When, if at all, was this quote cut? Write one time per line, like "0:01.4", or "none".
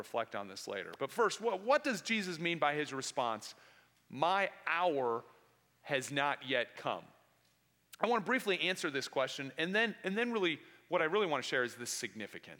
none